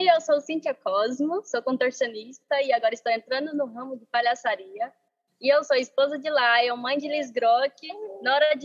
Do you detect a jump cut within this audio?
no; 0 cuts

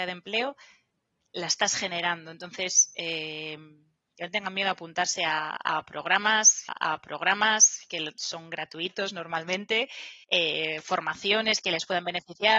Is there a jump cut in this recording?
yes; 2 cuts; at 6.7 s, 10.2 s

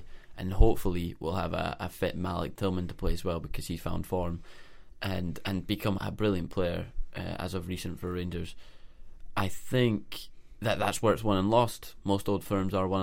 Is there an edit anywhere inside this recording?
yes; 2 cuts; at 3.8 s, 6.0 s

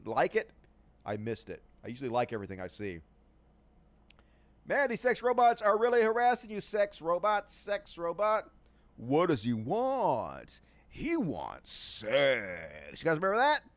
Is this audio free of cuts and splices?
yes; 0 cuts

